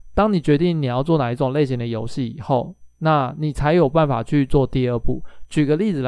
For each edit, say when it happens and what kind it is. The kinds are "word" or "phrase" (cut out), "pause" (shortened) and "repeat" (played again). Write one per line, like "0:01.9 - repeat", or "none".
0:02.9 - pause